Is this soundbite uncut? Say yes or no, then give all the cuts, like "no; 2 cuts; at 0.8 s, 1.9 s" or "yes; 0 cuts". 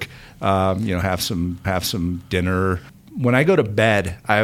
no; 1 cut; at 1.6 s